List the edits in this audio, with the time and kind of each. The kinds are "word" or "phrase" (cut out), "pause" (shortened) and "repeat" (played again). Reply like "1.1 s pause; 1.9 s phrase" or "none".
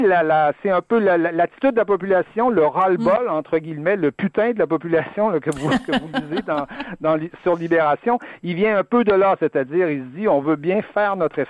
none